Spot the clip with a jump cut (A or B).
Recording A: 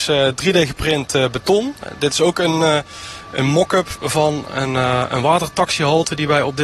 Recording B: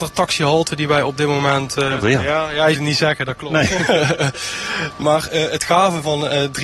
B